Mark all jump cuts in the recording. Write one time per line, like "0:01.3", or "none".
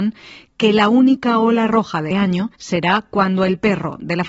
0:02.1
0:02.5

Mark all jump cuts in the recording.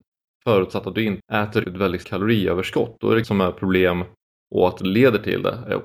0:01.2
0:01.6
0:02.0
0:03.2
0:04.8

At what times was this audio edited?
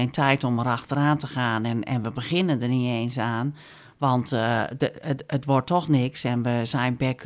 none

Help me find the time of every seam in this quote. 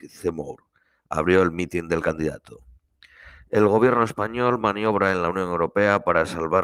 none

